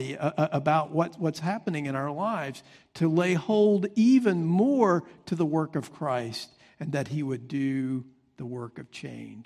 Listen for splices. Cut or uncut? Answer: uncut